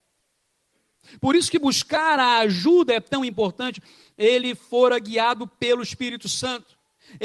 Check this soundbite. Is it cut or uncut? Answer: uncut